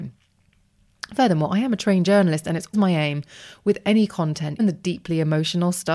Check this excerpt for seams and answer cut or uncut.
cut